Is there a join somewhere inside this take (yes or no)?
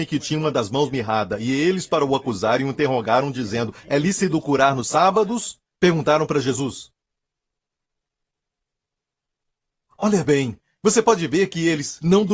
no